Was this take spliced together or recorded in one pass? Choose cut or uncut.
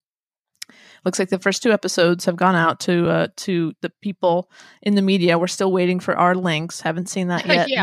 uncut